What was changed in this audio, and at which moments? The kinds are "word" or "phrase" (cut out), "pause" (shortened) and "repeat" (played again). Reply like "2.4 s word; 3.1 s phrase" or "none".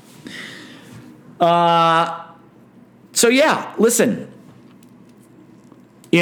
none